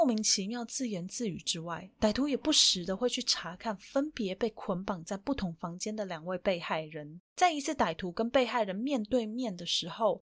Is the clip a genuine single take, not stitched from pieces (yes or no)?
no